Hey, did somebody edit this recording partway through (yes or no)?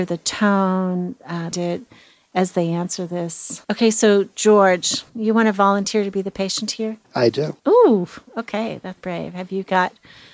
yes